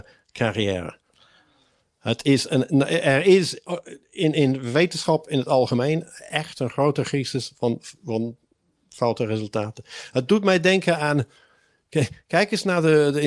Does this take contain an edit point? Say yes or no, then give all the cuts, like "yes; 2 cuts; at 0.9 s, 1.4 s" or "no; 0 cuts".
no; 0 cuts